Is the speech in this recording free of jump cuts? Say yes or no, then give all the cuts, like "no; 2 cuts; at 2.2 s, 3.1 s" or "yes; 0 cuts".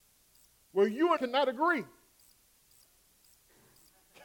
no; 1 cut; at 1.2 s